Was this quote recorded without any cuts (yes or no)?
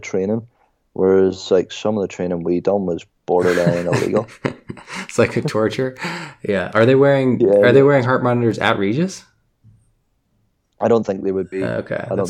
yes